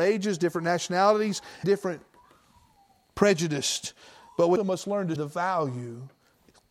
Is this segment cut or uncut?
cut